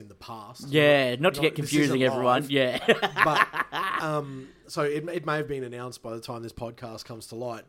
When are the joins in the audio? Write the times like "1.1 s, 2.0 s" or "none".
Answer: none